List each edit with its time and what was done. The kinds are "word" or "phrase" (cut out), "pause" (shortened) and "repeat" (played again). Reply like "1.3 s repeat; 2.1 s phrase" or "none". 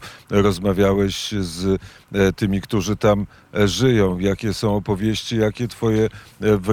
none